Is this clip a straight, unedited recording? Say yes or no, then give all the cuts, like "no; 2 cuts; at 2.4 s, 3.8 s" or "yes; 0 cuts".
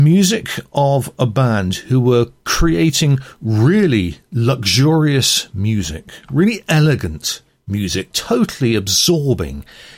no; 1 cut; at 8.1 s